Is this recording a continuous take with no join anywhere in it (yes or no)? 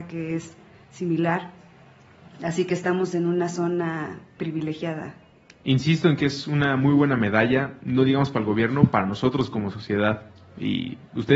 no